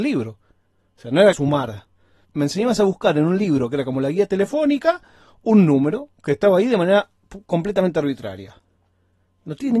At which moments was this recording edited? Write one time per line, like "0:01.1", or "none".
0:01.3